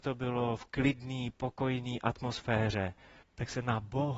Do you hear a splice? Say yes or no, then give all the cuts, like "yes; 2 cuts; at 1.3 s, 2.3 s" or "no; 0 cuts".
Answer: yes; 1 cut; at 3.2 s